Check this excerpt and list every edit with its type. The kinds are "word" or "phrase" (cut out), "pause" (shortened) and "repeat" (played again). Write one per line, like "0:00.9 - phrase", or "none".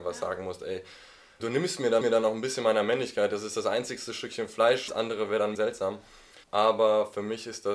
0:01.4 - word
0:02.0 - repeat
0:04.9 - word
0:05.5 - word
0:06.4 - pause